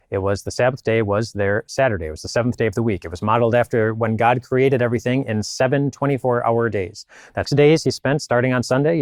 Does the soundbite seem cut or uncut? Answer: cut